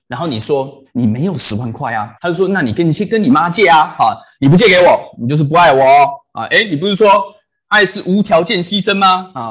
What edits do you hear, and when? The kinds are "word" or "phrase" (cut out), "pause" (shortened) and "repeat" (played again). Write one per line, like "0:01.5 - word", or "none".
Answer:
0:02.2 - pause